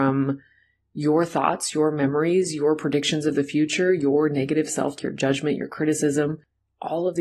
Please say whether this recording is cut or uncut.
cut